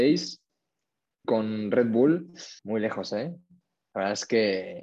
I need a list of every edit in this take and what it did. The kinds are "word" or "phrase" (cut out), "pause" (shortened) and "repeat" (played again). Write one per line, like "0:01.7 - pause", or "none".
0:01.2 - word
0:02.6 - pause